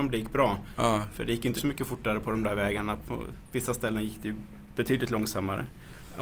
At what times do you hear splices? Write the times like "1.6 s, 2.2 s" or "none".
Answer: 1.6 s